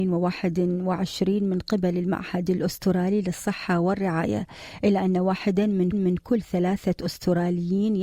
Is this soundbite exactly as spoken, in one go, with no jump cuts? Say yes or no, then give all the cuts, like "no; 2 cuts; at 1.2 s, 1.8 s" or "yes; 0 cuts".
no; 1 cut; at 5.9 s